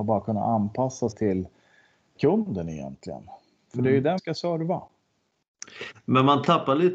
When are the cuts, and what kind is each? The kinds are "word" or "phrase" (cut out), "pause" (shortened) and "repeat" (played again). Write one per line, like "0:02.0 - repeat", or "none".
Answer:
0:01.1 - word
0:02.2 - word
0:04.2 - word